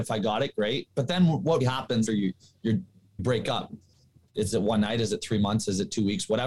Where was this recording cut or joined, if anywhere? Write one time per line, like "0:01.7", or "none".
0:01.6
0:02.1
0:03.2
0:04.5